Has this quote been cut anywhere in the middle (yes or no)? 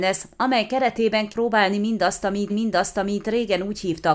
yes